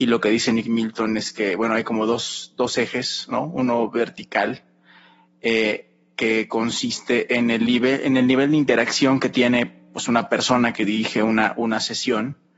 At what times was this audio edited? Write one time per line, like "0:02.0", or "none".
none